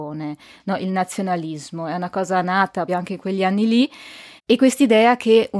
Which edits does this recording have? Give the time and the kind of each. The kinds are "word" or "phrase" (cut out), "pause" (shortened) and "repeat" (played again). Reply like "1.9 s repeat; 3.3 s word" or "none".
2.9 s word; 4.4 s pause